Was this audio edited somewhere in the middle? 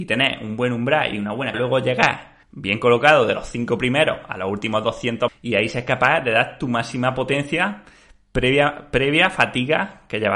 yes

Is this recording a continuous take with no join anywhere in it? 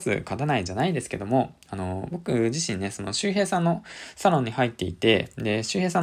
yes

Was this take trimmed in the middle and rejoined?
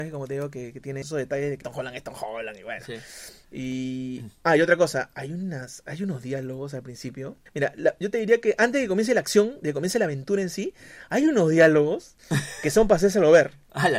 yes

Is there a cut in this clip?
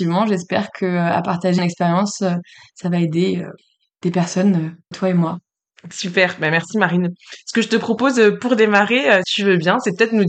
yes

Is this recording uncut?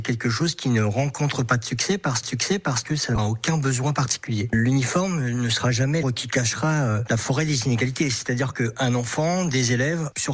no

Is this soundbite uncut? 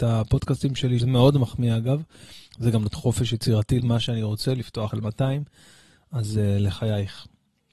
no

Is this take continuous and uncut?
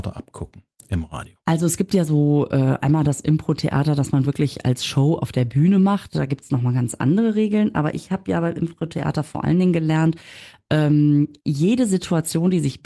no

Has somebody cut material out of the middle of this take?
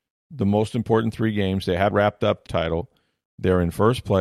yes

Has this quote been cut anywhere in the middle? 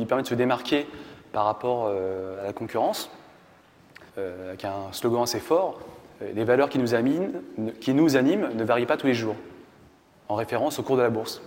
yes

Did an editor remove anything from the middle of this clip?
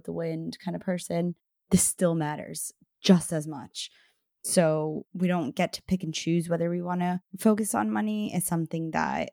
no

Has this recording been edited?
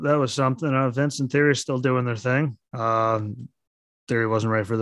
yes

